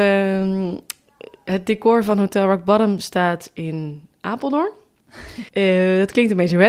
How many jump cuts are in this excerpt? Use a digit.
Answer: 1